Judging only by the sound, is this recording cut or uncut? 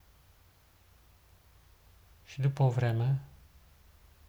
uncut